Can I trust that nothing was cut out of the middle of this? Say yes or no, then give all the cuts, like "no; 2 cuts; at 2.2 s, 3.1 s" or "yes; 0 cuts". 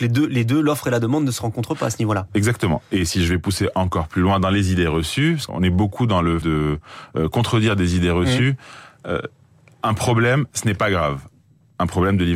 no; 2 cuts; at 5.5 s, 6.4 s